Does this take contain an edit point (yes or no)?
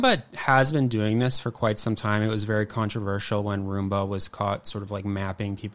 no